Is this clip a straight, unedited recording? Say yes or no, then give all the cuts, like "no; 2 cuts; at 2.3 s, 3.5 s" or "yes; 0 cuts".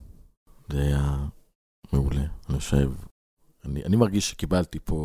yes; 0 cuts